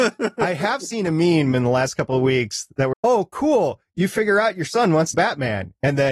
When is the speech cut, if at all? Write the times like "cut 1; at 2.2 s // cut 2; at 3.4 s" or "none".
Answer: cut 1; at 2.9 s // cut 2; at 5.1 s